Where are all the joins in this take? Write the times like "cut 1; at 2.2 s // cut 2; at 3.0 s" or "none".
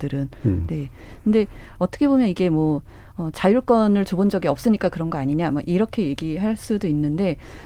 none